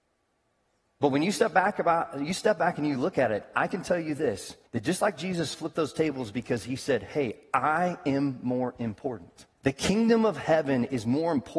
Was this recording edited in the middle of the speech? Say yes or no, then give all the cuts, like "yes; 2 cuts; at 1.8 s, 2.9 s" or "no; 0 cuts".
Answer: yes; 2 cuts; at 4.7 s, 9.5 s